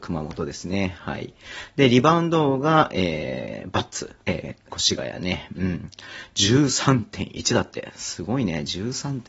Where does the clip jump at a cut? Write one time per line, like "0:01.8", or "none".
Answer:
0:04.2
0:04.7